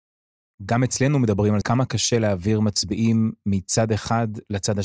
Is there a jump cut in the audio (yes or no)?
yes